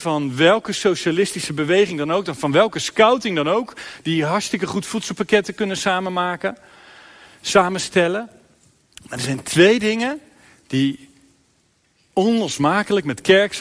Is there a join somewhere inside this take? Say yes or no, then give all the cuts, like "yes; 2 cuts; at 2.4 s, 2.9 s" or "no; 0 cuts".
no; 0 cuts